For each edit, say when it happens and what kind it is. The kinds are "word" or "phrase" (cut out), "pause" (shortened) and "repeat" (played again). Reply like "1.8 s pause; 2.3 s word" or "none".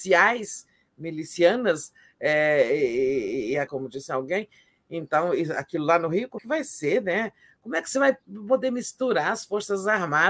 3.7 s word; 6.4 s word